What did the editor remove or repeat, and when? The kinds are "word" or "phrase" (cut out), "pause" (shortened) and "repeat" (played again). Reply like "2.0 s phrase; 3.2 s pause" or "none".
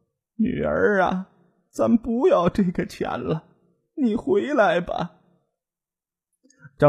none